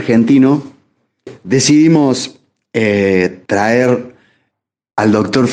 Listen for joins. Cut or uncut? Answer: cut